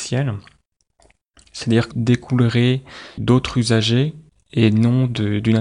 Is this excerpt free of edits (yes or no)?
no